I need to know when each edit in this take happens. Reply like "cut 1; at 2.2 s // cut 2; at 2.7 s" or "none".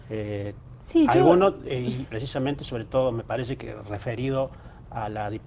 cut 1; at 2.1 s